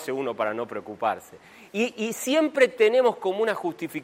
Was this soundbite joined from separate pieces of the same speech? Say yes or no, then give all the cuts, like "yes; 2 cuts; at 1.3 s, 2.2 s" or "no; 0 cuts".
no; 0 cuts